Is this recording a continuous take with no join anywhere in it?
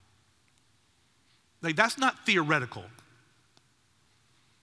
yes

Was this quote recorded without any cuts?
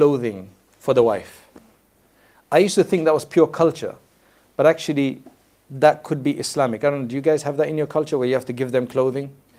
yes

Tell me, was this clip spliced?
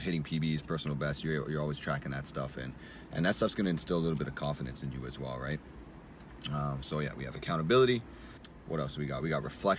no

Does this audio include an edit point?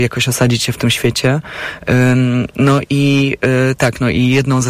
no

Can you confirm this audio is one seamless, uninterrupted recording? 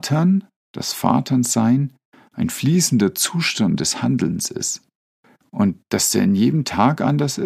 yes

